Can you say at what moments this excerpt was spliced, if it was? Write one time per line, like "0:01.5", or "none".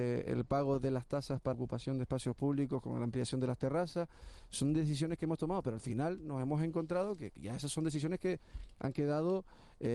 0:01.5
0:07.4